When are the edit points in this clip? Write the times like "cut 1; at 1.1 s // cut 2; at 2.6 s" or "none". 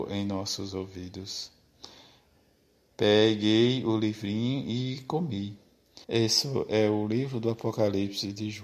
cut 1; at 6.0 s